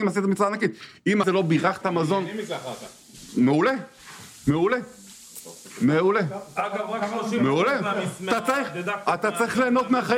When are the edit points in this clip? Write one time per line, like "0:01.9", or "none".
0:01.2
0:01.8